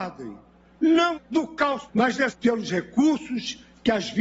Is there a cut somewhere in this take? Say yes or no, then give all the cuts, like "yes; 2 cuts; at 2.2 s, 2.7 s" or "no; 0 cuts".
yes; 3 cuts; at 1.1 s, 1.9 s, 2.3 s